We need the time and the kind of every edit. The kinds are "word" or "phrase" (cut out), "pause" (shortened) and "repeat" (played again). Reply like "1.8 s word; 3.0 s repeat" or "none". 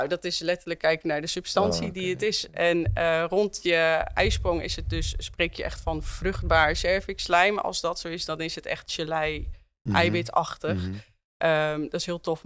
none